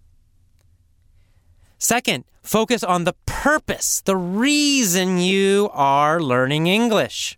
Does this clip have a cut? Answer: no; 0 cuts

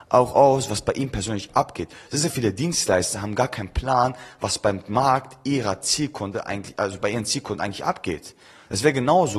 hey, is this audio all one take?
yes; 0 cuts

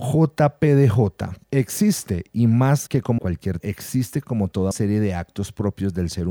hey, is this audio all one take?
no; 5 cuts; at 1.4 s, 2.9 s, 3.2 s, 3.6 s, 4.7 s

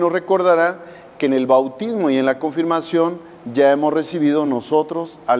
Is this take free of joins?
yes; 0 cuts

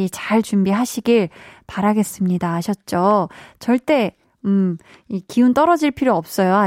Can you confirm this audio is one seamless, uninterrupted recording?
yes; 0 cuts

